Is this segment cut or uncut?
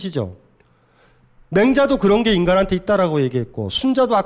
uncut